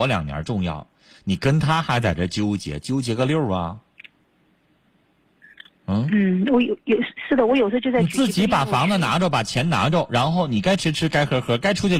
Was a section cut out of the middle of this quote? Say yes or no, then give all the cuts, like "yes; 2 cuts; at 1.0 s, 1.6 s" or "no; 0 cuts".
no; 0 cuts